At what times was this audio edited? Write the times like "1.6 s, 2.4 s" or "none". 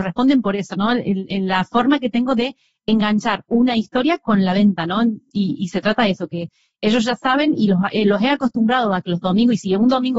none